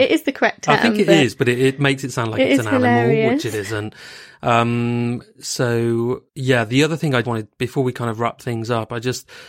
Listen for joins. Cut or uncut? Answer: cut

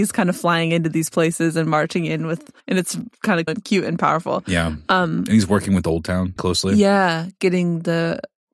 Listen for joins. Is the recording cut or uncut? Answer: cut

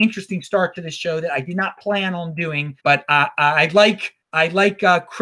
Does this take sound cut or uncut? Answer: cut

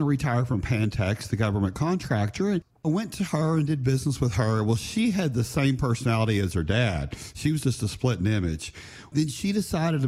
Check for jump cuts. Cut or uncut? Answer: uncut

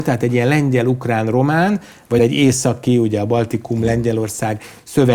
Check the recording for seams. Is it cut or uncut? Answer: cut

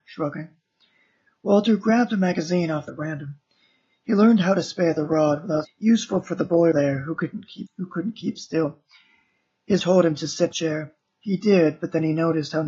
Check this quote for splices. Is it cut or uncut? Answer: cut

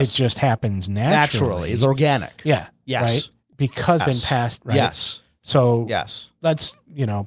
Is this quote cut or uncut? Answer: cut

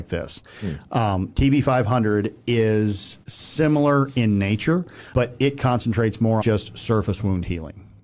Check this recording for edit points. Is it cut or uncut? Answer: cut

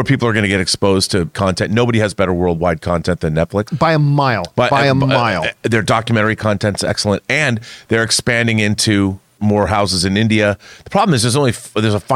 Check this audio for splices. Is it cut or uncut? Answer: cut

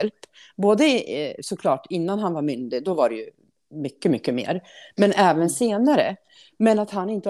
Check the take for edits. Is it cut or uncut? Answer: uncut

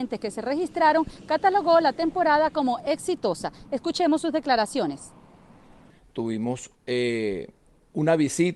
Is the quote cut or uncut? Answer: cut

